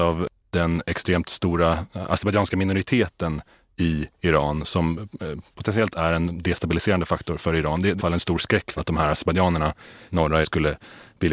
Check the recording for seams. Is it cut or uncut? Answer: cut